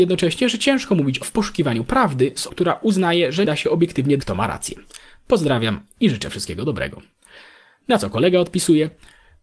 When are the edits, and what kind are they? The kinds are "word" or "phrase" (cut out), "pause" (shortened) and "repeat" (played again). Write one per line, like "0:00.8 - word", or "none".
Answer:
0:01.2 - word
0:02.5 - word
0:03.4 - word
0:04.2 - word